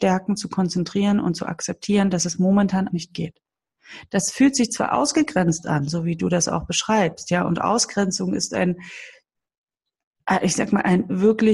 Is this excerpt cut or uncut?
cut